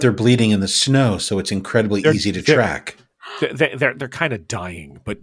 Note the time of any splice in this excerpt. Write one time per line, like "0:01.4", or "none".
none